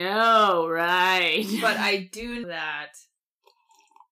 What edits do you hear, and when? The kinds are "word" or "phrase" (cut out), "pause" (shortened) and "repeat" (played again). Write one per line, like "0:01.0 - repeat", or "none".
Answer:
0:02.4 - word

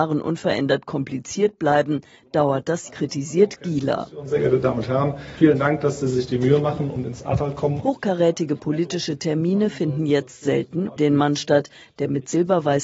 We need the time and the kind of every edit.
0:02.9 - word
0:11.0 - word

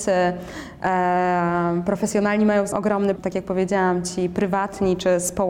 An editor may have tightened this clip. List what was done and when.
0:02.7 - word
0:03.2 - phrase

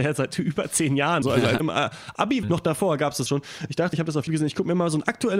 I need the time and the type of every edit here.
0:01.2 - word
0:01.6 - word
0:02.4 - word
0:03.3 - word
0:03.9 - word
0:04.3 - word

